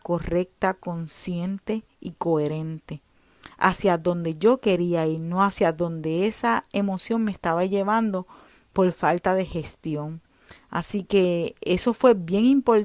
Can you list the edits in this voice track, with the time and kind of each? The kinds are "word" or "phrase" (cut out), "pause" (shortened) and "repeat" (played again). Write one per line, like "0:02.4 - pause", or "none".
none